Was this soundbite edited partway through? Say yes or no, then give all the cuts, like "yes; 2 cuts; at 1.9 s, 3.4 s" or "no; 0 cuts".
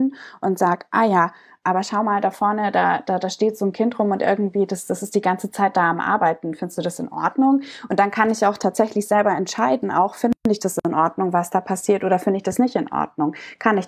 no; 0 cuts